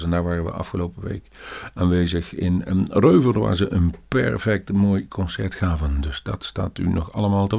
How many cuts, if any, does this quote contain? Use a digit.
0